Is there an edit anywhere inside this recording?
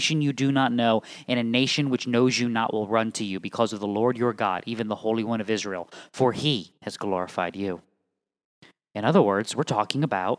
yes; 1 cut; at 6.8 s

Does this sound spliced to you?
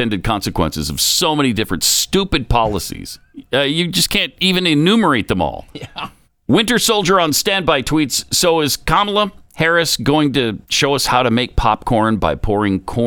yes; 2 cuts; at 6.2 s, 10.6 s

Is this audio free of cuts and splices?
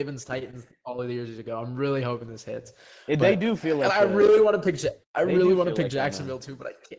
no; 1 cut; at 5.0 s

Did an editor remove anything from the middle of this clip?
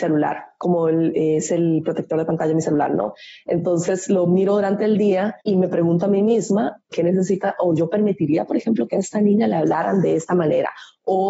yes; 2 cuts; at 5.4 s, 6.9 s

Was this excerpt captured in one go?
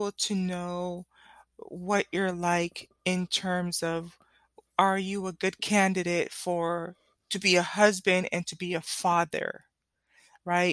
yes; 0 cuts

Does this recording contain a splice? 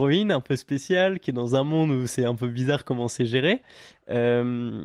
no; 0 cuts

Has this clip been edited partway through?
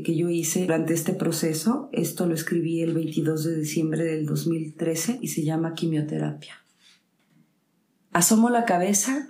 no; 0 cuts

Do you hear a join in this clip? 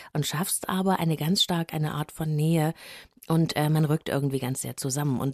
yes; 1 cut; at 1.7 s

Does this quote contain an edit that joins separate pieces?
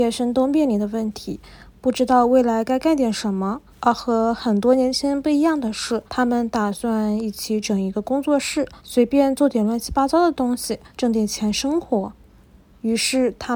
yes; 4 cuts; at 3.7 s, 6.1 s, 8.8 s, 10.9 s

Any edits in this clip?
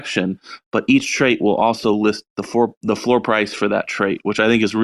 no; 0 cuts

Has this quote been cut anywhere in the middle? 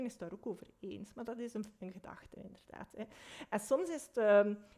no; 0 cuts

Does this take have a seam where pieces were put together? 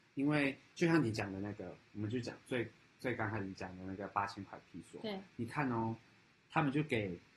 no; 0 cuts

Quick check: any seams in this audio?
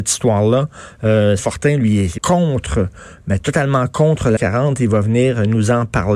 yes; 3 cuts; at 1.4 s, 2.2 s, 4.4 s

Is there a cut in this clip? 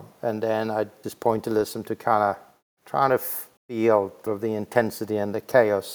yes; 4 cuts; at 1.0 s, 2.7 s, 3.6 s, 4.3 s

